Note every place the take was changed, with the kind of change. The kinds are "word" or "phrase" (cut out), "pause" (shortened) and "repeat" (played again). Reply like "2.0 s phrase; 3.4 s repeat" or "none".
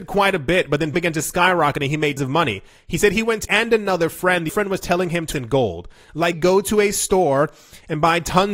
0.9 s word; 2.2 s word; 3.4 s word; 4.5 s word; 5.3 s word; 6.3 s word